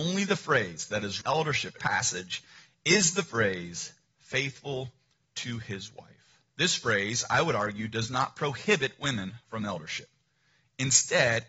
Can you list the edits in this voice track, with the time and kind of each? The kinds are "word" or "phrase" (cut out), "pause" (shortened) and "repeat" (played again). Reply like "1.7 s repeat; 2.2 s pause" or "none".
1.2 s phrase; 1.8 s phrase; 4.1 s pause; 6.5 s pause

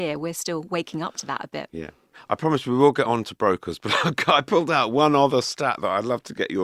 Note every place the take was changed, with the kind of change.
none

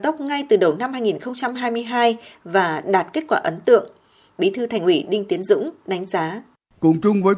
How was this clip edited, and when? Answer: none

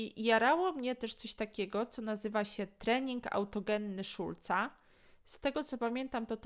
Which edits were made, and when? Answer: none

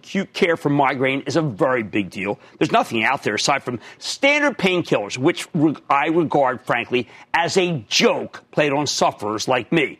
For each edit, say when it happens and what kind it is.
none

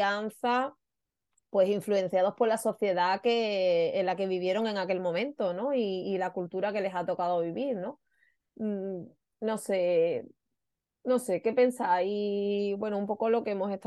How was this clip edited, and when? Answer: none

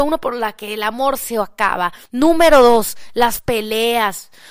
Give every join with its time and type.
2.1 s pause; 3.4 s word

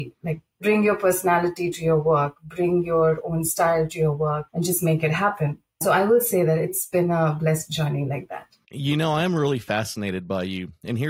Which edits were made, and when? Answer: none

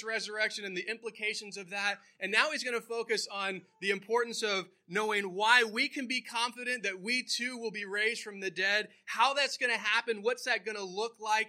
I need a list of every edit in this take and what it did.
none

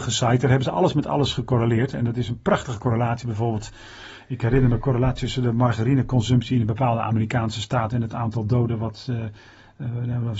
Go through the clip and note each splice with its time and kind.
none

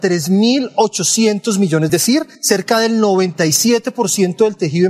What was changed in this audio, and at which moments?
1.9 s phrase; 2.3 s pause

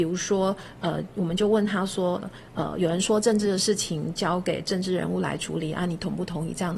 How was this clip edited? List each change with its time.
none

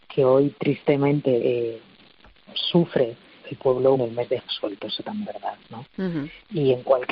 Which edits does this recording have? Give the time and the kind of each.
1.4 s word; 3.4 s word; 4.0 s word; 4.4 s phrase; 5.2 s word

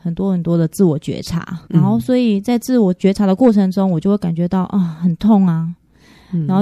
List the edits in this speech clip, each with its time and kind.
1.7 s pause

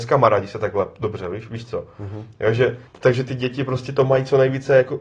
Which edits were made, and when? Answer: 2.9 s pause

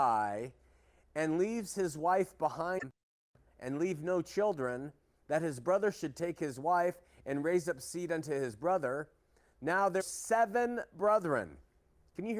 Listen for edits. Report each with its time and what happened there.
10.0 s word

